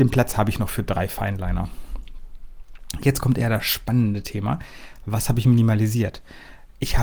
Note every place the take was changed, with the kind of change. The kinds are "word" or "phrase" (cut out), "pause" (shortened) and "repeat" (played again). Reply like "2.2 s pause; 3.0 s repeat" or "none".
none